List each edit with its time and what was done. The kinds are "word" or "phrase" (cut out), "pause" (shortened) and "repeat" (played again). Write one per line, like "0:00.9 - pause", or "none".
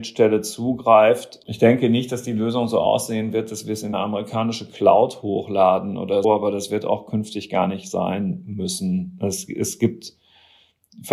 0:03.9 - word
0:06.2 - word